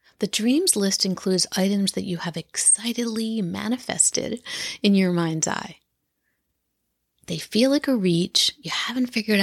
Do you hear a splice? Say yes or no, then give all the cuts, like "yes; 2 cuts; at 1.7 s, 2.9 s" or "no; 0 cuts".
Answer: no; 0 cuts